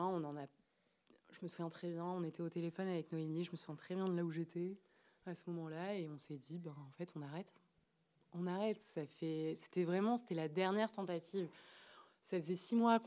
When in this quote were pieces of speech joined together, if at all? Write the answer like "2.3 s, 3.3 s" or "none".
none

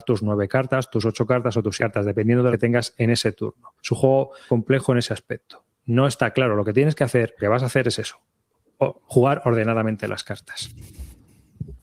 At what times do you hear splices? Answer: 1.8 s, 2.5 s, 3.8 s, 4.5 s, 7.4 s

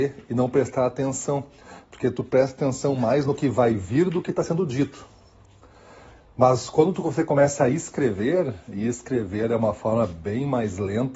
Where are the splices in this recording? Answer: none

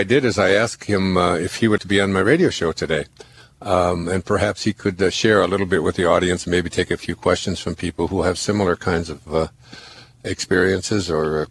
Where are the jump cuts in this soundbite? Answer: 1.8 s

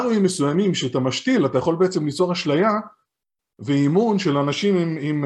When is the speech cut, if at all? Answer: none

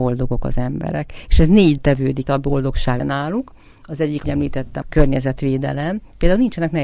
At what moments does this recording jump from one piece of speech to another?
1.8 s, 2.3 s, 3.0 s, 4.2 s, 4.8 s

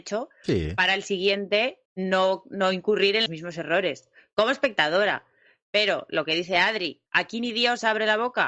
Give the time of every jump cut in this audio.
1.9 s, 3.3 s, 7.1 s

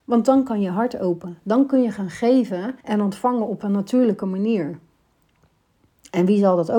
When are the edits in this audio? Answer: 2.8 s

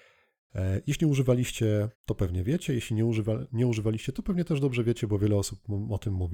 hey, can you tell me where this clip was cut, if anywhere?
1.9 s

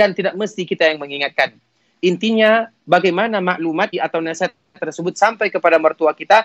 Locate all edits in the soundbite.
2.8 s, 3.9 s

